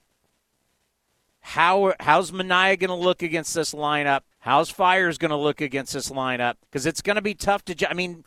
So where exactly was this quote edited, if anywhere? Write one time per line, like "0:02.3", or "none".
0:04.3
0:06.6